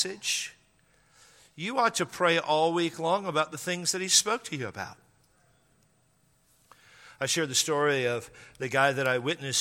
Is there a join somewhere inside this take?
no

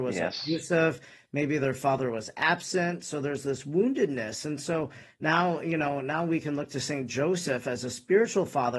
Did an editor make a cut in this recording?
no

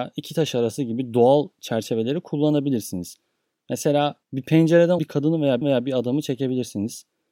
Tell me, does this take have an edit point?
yes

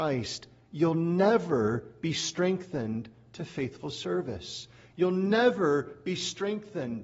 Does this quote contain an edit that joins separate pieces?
no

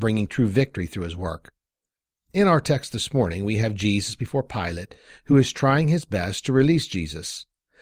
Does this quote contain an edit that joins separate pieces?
no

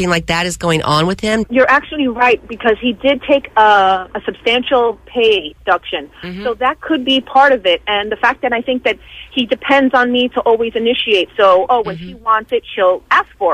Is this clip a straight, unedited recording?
yes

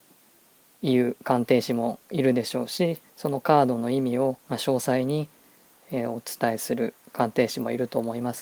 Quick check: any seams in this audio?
yes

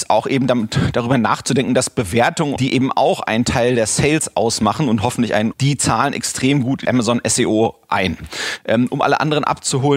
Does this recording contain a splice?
yes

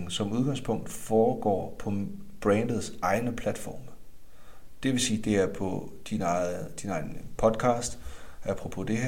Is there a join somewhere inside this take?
no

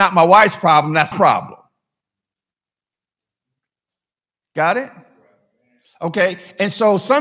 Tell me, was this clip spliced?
yes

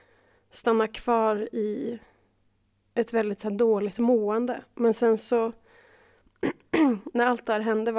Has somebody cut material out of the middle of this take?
no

